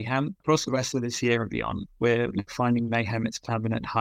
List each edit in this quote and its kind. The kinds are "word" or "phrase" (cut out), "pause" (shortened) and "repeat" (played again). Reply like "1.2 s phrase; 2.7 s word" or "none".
2.5 s phrase